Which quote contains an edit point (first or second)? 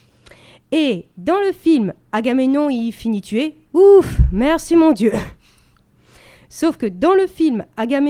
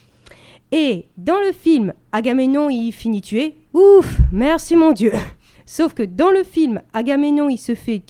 second